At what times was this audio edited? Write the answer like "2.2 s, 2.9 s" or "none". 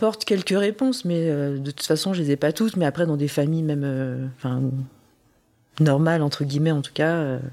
none